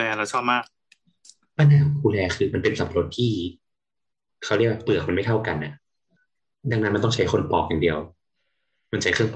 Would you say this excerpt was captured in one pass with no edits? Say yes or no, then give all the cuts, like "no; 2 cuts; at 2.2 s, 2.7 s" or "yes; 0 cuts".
yes; 0 cuts